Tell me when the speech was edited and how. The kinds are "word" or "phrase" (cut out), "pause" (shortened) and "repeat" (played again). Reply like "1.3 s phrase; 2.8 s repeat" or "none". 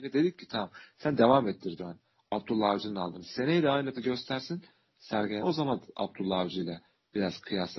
1.8 s word; 3.9 s word; 5.4 s word